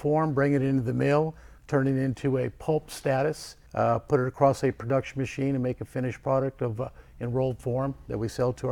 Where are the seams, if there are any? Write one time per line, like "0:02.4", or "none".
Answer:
0:01.6
0:03.7